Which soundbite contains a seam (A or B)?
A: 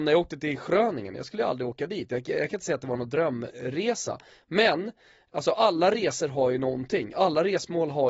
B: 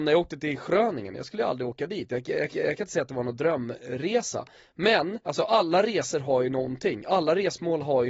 B